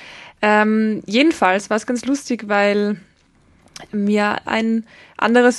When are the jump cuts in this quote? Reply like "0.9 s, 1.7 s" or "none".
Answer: 4.5 s